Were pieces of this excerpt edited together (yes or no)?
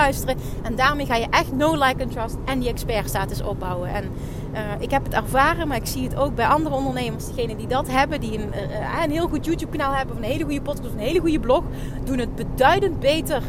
no